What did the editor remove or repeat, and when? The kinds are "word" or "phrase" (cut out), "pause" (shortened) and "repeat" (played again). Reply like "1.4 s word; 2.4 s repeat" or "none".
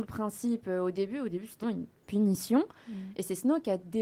1.6 s word